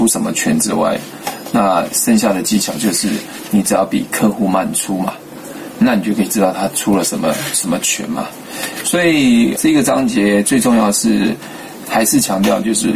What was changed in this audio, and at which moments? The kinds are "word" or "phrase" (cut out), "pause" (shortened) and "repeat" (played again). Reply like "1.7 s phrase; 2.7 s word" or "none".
9.6 s word